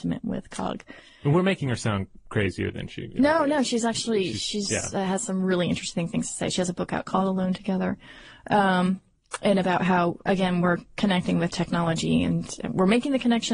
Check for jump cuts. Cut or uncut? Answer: uncut